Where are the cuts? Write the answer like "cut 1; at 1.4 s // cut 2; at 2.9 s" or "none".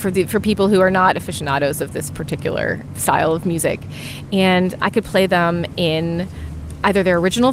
none